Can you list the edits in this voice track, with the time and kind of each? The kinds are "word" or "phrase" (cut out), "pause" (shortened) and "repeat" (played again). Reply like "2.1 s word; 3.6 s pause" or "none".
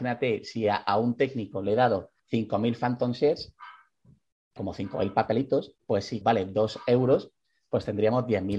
2.2 s pause; 4.6 s word; 5.8 s pause; 6.2 s phrase

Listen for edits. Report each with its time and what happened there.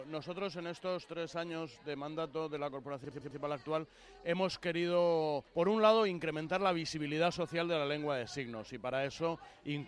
5.5 s pause

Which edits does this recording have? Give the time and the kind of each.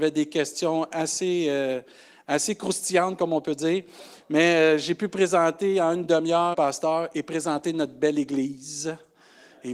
6.5 s phrase

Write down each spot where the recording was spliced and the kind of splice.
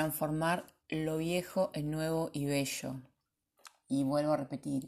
none

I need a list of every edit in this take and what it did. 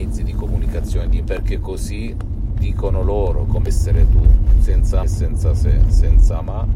1.2 s word; 3.7 s word; 5.0 s phrase

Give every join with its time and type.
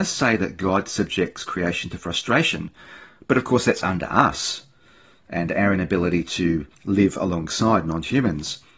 6.7 s pause

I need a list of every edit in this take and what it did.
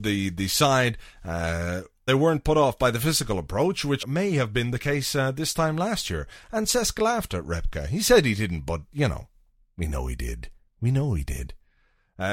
2.1 s phrase; 4.0 s word

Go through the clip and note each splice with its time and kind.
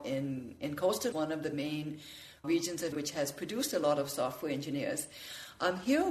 1.1 s phrase; 2.4 s word; 2.9 s word

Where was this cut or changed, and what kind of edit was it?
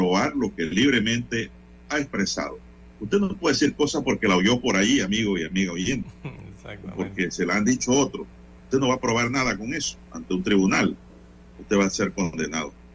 none

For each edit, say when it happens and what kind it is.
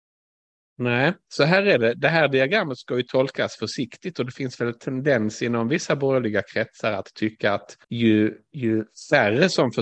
7.8 s pause

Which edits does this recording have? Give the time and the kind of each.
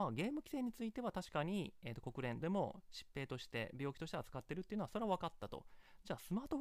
2.4 s word

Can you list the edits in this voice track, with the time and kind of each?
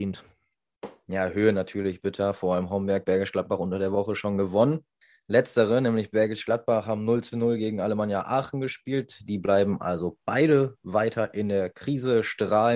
5.0 s pause

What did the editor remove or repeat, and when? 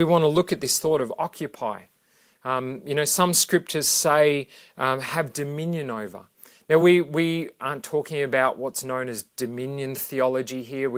none

